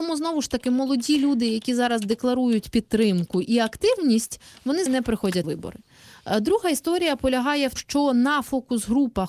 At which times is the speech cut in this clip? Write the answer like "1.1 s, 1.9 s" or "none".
4.9 s, 5.4 s, 7.8 s